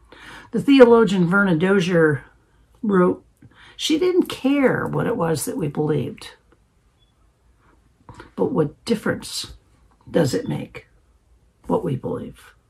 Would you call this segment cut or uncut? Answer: uncut